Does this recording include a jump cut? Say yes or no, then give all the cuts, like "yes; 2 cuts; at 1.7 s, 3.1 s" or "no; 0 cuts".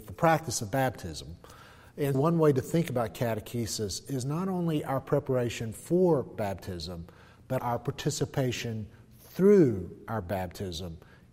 yes; 2 cuts; at 2.1 s, 7.6 s